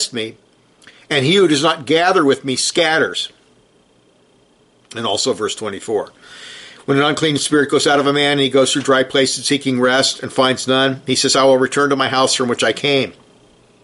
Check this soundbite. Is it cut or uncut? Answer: uncut